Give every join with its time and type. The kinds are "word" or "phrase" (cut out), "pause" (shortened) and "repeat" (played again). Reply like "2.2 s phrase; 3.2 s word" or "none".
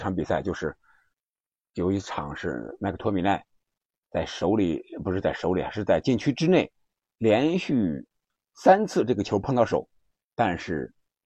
none